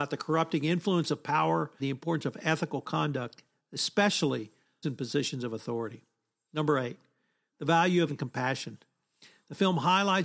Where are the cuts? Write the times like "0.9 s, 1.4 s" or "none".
1.8 s, 4.8 s, 8.1 s